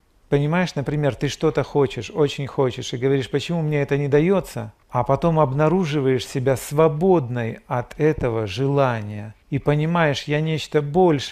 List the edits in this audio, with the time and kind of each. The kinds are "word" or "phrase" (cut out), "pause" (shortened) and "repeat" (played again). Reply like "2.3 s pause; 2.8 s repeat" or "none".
4.8 s pause; 9.4 s pause